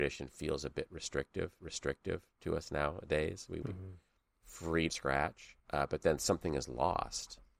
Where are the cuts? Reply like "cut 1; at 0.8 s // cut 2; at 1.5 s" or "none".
cut 1; at 1.6 s // cut 2; at 3.6 s // cut 3; at 4.9 s // cut 4; at 5.6 s